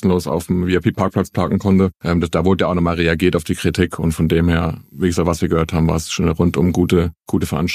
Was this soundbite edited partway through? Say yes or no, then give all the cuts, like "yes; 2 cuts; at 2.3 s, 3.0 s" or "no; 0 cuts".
yes; 1 cut; at 1.9 s